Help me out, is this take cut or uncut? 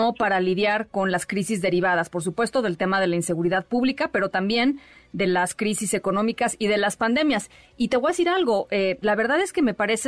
uncut